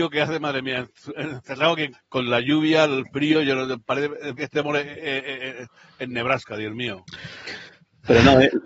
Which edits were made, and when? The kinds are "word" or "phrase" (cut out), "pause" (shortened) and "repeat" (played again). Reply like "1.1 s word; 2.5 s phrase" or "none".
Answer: 1.9 s word; 4.4 s word